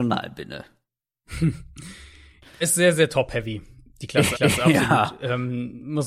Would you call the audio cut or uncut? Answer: cut